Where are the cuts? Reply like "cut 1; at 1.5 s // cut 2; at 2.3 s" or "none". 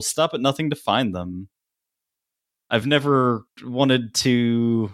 none